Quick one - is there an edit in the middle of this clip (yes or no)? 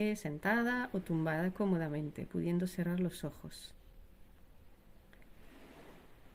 no